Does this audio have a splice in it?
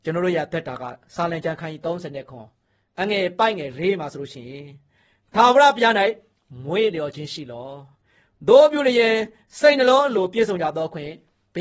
no; 0 cuts

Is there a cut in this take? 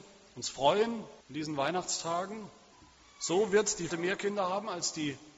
yes; 3 cuts; at 1.2 s, 2.7 s, 3.9 s

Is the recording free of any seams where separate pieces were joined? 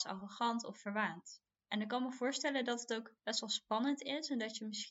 no; 2 cuts; at 1.6 s, 3.2 s

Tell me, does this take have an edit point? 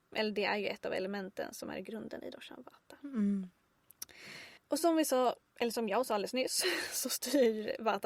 yes; 2 cuts; at 4.6 s, 5.5 s

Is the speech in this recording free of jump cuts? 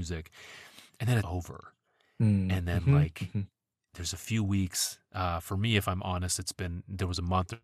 no; 1 cut; at 1.2 s

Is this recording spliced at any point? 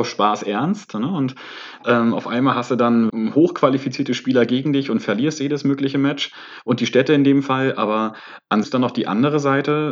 yes; 2 cuts; at 3.1 s, 8.6 s

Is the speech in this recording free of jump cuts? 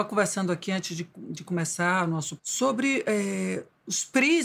no; 1 cut; at 2.4 s

